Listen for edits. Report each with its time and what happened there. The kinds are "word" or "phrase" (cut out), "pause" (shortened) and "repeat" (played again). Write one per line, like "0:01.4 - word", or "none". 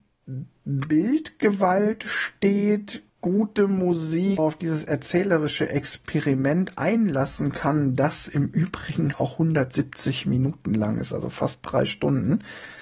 0:03.1 - pause
0:04.4 - phrase
0:09.1 - word